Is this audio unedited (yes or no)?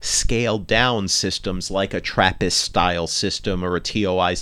yes